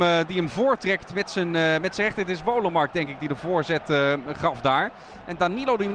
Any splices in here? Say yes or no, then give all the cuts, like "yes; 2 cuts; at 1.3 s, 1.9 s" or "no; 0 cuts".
no; 0 cuts